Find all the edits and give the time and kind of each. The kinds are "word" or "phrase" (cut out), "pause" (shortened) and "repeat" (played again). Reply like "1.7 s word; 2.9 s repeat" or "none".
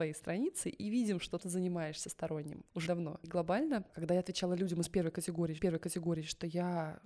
1.4 s phrase; 2.9 s word; 5.6 s repeat